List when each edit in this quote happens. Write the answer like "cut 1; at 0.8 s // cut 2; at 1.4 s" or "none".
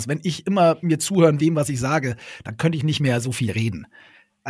cut 1; at 1.4 s